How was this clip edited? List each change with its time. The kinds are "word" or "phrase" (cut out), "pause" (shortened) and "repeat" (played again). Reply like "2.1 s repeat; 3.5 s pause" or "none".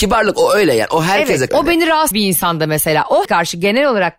1.5 s word; 2.1 s word; 3.2 s word